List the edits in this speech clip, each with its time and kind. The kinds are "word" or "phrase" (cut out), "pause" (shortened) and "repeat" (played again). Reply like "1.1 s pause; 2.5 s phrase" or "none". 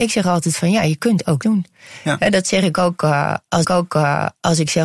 1.4 s word; 3.6 s repeat